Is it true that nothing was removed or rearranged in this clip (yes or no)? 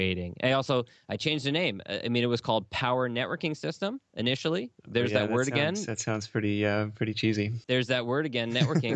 no